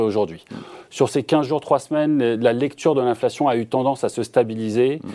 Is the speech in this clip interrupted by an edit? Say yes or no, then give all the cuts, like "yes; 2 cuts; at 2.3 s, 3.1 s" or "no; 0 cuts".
no; 0 cuts